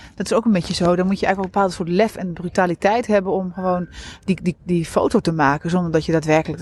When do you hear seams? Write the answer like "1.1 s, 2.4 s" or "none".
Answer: none